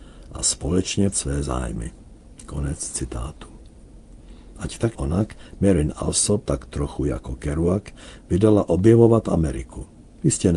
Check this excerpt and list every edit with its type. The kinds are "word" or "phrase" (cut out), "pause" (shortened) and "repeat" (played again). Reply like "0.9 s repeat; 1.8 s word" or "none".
1.1 s word; 4.9 s word; 6.4 s word